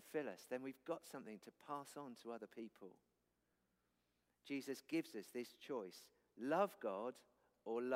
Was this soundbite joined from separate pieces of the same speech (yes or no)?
no